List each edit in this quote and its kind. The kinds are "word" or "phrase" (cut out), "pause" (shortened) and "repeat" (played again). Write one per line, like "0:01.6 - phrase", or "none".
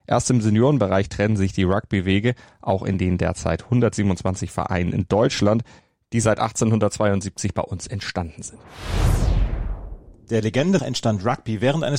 0:10.8 - word